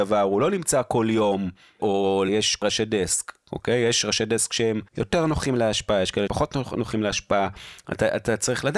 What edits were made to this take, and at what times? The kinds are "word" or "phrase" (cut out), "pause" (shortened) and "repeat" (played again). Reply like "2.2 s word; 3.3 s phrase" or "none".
2.3 s word; 2.6 s word; 4.9 s pause; 6.3 s word